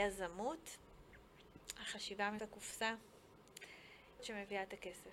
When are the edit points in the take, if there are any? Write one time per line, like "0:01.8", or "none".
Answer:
0:02.4
0:04.2